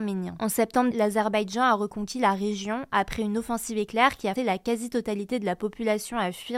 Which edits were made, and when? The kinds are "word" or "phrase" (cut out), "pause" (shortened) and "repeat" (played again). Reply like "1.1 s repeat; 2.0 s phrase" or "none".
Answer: 0.9 s word; 4.4 s word